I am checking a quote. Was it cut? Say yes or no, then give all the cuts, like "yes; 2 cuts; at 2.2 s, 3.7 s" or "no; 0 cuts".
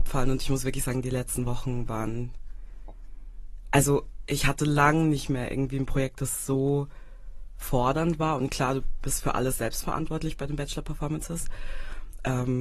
no; 0 cuts